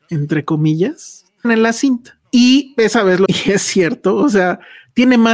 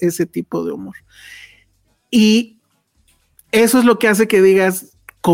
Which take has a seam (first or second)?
first